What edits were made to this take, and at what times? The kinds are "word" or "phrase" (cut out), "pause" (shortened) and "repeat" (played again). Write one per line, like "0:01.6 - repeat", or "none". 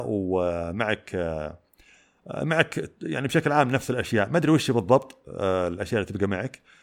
none

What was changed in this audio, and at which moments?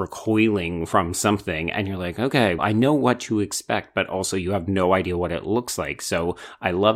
0:02.6 - word

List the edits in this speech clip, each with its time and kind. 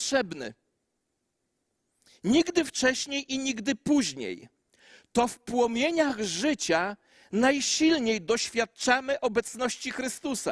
none

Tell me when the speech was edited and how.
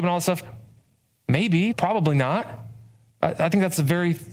0:01.7 - word

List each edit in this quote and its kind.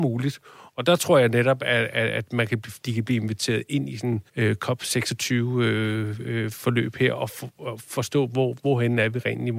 0:02.8 - pause
0:04.3 - pause

